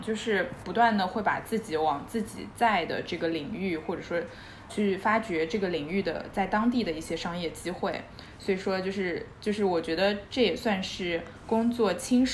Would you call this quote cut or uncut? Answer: cut